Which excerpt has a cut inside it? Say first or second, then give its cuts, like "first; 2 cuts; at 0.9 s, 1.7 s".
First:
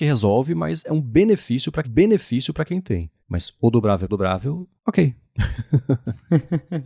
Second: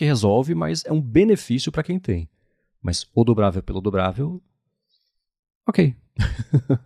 first; 4 cuts; at 1.8 s, 3.2 s, 4.1 s, 4.8 s